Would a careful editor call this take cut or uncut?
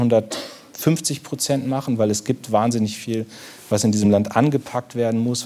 uncut